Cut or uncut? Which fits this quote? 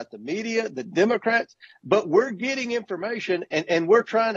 uncut